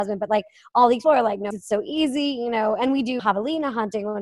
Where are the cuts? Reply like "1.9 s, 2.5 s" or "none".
1.0 s, 1.5 s, 3.2 s